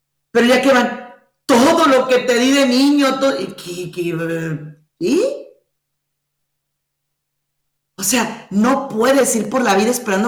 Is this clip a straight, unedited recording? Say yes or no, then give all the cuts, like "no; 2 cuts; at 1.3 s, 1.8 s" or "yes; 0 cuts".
yes; 0 cuts